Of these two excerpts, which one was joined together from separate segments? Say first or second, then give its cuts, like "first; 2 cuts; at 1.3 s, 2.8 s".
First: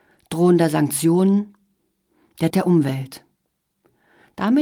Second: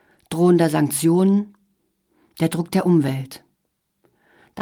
first; 1 cut; at 2.5 s